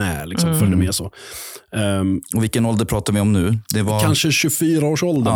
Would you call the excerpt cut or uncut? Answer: uncut